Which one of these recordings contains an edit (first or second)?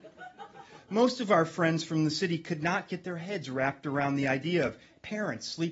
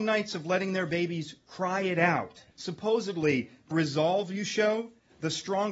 second